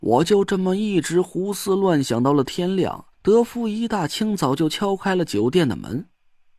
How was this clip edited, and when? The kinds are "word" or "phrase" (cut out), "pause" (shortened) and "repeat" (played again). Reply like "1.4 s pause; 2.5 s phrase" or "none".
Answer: 3.1 s pause

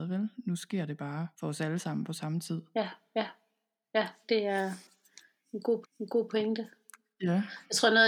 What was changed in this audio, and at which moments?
1.3 s pause; 4.2 s word; 5.8 s repeat

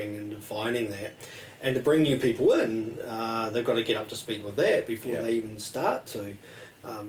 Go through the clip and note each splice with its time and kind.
none

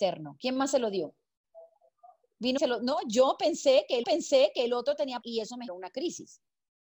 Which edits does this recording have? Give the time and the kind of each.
2.6 s phrase; 4.0 s repeat; 5.2 s word; 5.7 s word

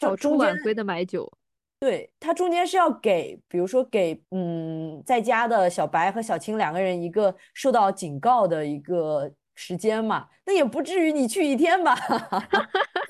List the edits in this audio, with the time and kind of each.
4.2 s pause

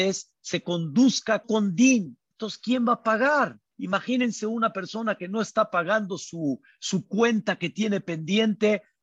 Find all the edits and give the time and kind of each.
1.4 s phrase; 3.7 s pause

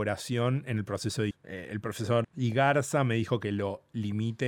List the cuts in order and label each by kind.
1.3 s word; 2.2 s word

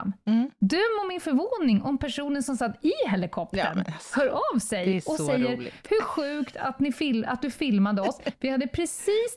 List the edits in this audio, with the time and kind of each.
none

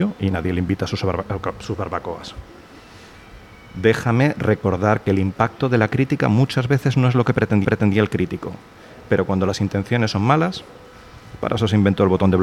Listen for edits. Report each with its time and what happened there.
7.6 s repeat

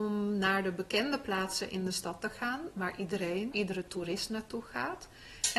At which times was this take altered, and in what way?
3.5 s word

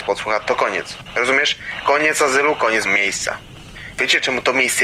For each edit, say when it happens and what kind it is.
2.9 s word

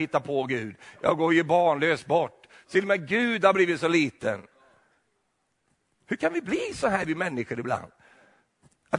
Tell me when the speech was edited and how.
none

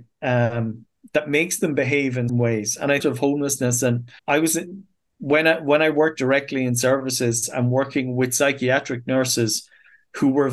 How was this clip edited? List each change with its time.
2.3 s word; 3.0 s phrase; 4.2 s pause

